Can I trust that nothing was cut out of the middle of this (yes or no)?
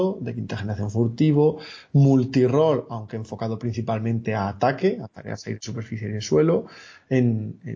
yes